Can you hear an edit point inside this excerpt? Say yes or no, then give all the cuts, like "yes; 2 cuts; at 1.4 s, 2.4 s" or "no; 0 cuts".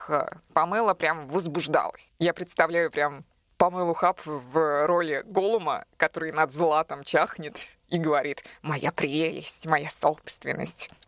no; 0 cuts